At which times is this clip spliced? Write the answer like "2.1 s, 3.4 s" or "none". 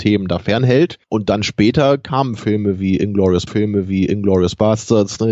1.0 s, 3.5 s